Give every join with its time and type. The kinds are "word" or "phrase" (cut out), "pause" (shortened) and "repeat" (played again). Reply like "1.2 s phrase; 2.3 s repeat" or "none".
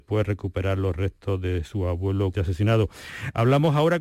2.3 s word

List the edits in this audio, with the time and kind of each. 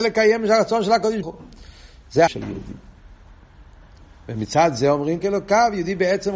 1.2 s word; 2.3 s word; 5.2 s phrase

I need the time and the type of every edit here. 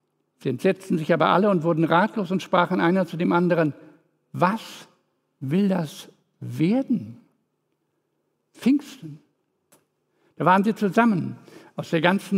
none

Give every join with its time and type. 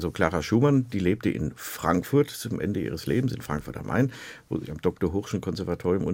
none

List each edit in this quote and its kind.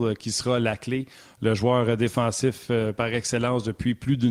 none

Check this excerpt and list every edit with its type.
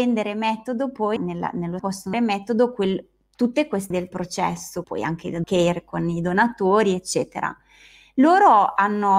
1.2 s word; 1.8 s word; 2.1 s word; 3.9 s word; 4.8 s word; 5.4 s word

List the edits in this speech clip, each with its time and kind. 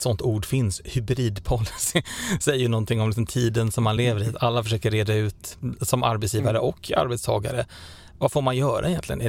none

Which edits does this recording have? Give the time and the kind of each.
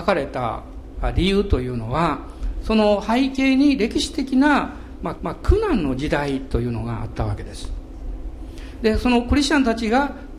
5.2 s repeat

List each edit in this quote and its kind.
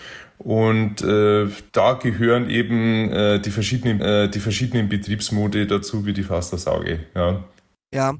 1.7 s pause; 4.0 s repeat

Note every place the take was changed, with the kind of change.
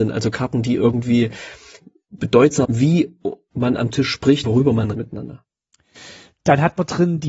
2.2 s word; 2.6 s word; 4.4 s word; 4.9 s word

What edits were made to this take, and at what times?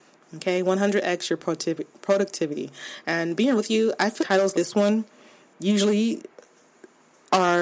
3.6 s word; 4.2 s word; 4.5 s word

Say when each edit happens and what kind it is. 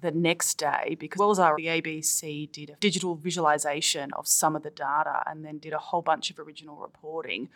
1.2 s word; 1.5 s word; 2.8 s word

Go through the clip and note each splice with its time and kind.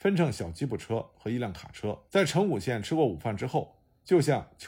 2.1 s pause

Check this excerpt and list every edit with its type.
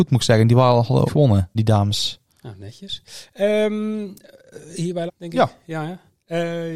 1.1 s word; 1.5 s word; 2.3 s pause; 5.1 s word

